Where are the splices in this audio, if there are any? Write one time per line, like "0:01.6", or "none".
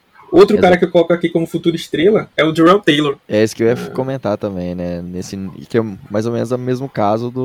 0:03.2

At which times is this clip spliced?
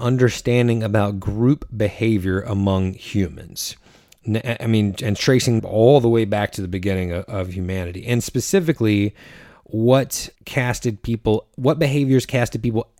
0:05.6
0:10.4

